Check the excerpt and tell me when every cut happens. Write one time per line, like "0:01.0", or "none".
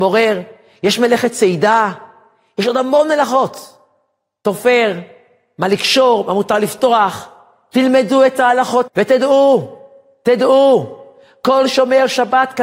0:08.9